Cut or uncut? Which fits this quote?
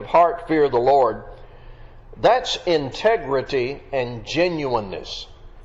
uncut